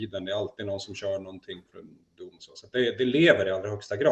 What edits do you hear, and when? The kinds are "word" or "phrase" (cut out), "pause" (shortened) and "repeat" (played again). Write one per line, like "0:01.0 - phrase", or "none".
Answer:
none